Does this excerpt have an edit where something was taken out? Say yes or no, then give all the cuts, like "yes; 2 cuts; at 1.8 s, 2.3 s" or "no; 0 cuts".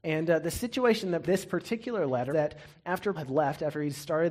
yes; 3 cuts; at 1.2 s, 2.3 s, 3.1 s